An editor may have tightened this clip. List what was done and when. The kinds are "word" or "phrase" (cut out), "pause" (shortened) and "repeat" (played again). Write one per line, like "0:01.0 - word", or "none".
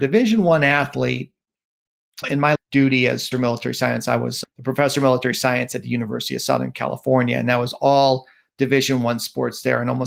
0:02.2 - word
0:02.5 - word
0:03.3 - word
0:04.4 - word